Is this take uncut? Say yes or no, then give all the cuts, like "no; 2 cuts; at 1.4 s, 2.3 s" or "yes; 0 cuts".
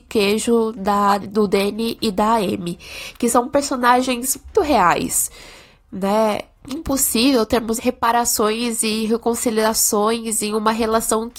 no; 4 cuts; at 1.2 s, 4.5 s, 6.7 s, 7.8 s